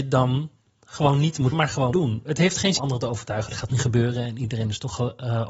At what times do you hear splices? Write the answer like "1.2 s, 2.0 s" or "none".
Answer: 1.5 s, 1.9 s, 2.8 s, 3.7 s

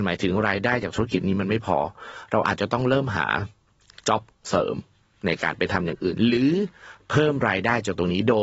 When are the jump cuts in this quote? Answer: none

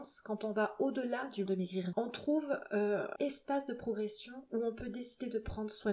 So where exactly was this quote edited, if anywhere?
1.5 s, 1.9 s, 3.2 s

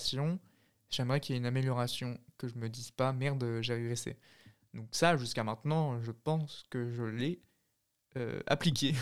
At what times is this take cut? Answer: none

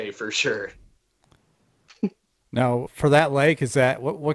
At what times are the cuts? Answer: 2.9 s

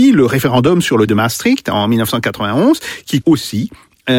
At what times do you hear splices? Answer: 1.1 s, 3.2 s

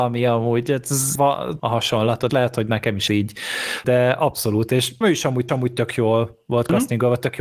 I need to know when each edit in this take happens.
1.2 s, 1.6 s, 2.3 s, 3.1 s, 3.8 s, 5.0 s, 5.5 s

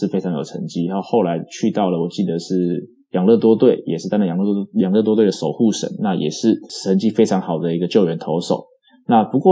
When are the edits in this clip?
none

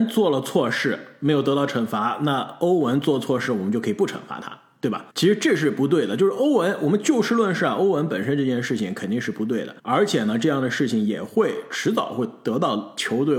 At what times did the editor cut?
5.1 s, 9.8 s

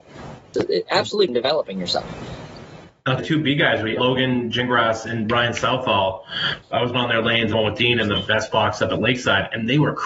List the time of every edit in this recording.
3.2 s, 4.0 s, 6.9 s, 7.5 s

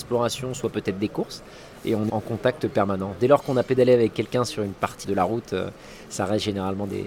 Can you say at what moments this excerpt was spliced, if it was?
2.1 s, 5.0 s

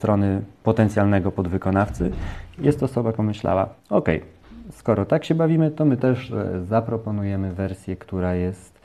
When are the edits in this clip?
3.1 s, 3.8 s

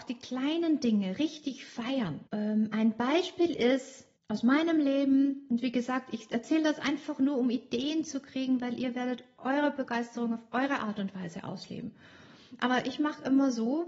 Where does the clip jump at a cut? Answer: 2.3 s, 4.2 s

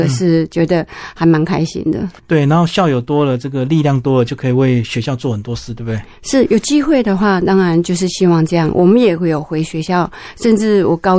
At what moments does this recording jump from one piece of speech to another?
2.2 s

